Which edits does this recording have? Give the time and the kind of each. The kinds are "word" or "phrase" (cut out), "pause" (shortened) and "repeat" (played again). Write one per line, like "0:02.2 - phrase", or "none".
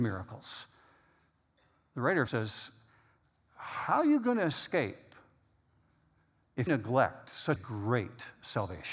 0:02.3 - word
0:06.7 - word
0:07.6 - word